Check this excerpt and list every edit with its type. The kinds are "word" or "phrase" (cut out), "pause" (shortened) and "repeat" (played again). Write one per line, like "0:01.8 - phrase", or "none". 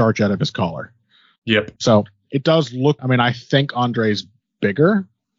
0:01.8 - pause
0:03.0 - word